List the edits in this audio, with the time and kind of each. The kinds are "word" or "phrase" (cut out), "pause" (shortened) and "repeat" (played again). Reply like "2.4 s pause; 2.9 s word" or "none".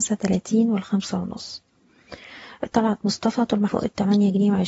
3.7 s word